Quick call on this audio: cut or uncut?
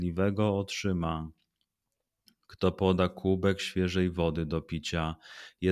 uncut